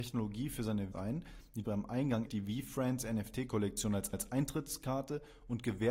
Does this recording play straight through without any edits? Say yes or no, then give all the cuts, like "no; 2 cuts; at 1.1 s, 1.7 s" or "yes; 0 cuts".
no; 4 cuts; at 0.9 s, 1.6 s, 2.3 s, 4.1 s